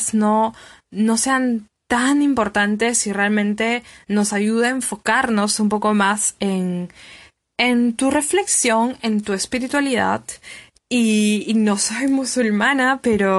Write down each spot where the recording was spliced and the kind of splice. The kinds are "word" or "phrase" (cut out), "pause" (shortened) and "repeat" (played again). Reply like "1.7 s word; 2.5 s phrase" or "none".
none